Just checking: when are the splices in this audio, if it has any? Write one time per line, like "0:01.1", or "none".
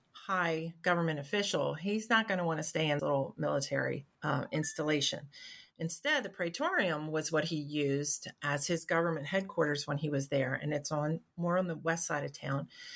0:03.0
0:04.1